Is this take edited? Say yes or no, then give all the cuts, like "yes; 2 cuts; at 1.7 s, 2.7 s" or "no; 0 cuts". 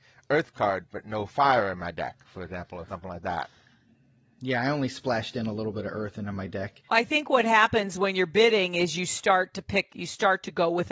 no; 0 cuts